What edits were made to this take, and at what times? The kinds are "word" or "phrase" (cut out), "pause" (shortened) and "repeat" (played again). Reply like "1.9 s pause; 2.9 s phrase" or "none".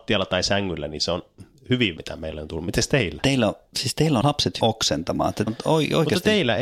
2.0 s word; 3.7 s word; 4.2 s word; 4.6 s word; 5.5 s word

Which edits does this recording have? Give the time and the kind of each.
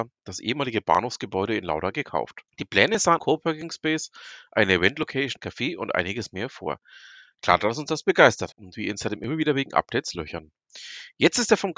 2.5 s pause; 3.2 s word; 5.4 s word; 8.5 s word

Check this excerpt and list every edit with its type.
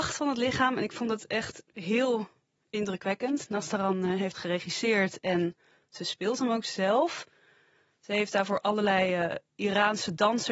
4.3 s phrase

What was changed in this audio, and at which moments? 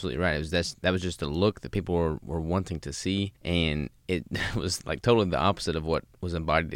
3.4 s pause

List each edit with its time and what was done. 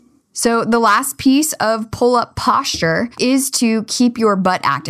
3.1 s pause

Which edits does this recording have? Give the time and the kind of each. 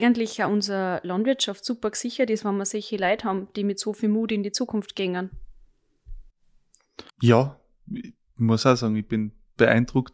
7.1 s pause

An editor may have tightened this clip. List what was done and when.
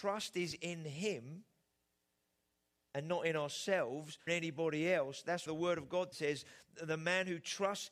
4.3 s word; 5.5 s word; 6.1 s word

